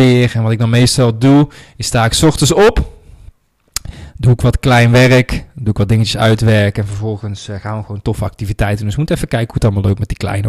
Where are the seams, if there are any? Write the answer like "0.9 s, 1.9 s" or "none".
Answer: none